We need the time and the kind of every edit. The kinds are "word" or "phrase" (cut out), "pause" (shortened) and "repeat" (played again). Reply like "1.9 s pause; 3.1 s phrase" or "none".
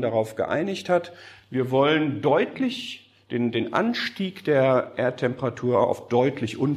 none